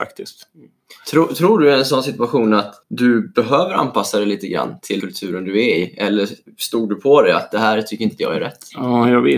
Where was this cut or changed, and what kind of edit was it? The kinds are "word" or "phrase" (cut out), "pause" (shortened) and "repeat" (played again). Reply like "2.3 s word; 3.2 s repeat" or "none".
2.8 s pause; 5.0 s word

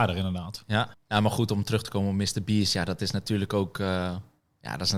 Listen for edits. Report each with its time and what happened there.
0.9 s pause

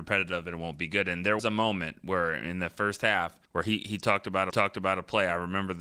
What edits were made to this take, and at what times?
1.4 s word; 3.4 s pause; 4.5 s repeat

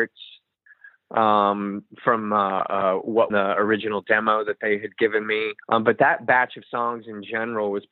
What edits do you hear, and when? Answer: 3.3 s phrase; 5.6 s pause

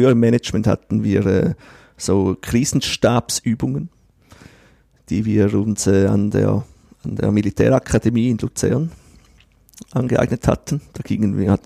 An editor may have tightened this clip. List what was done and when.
none

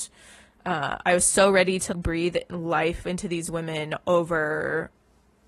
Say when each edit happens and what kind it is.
1.9 s word

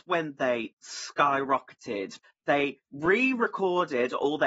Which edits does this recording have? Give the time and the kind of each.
2.2 s word; 2.8 s pause

